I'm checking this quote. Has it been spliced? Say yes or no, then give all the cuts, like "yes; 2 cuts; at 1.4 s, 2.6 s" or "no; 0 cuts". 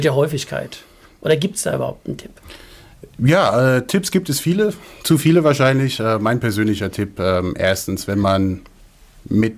no; 0 cuts